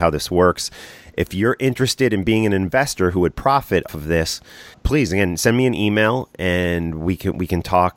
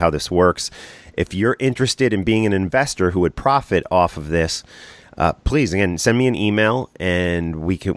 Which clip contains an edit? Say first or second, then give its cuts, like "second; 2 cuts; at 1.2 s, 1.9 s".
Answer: first; 2 cuts; at 3.9 s, 4.7 s